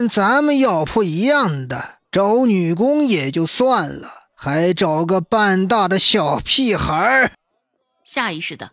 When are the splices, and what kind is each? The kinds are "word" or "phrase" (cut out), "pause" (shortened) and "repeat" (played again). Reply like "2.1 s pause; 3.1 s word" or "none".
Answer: 2.0 s pause; 4.3 s pause; 7.3 s pause